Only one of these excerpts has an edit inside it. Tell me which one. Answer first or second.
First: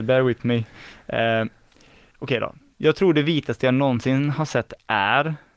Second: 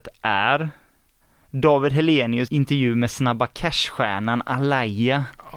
second